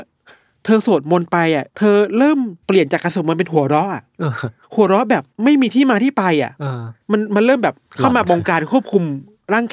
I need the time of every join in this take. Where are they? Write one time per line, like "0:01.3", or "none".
0:01.7
0:02.6
0:04.6
0:05.3
0:07.0
0:07.8